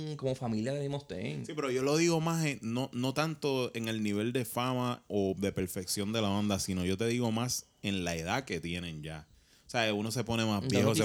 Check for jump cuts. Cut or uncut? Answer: uncut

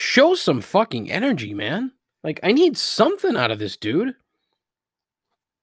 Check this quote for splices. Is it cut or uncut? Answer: uncut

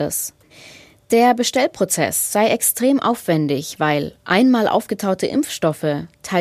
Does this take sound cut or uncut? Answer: uncut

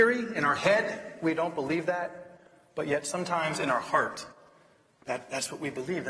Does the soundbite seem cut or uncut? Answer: uncut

